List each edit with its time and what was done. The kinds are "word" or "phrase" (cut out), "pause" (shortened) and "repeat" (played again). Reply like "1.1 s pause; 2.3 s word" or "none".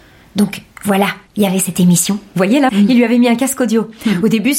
1.3 s pause; 2.7 s phrase